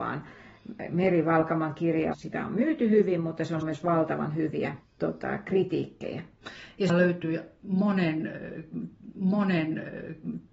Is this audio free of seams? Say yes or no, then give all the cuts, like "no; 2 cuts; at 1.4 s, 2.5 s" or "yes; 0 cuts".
no; 5 cuts; at 2.1 s, 3.6 s, 4.8 s, 6.9 s, 9.1 s